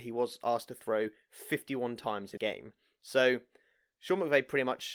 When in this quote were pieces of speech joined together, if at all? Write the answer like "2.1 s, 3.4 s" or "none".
2.4 s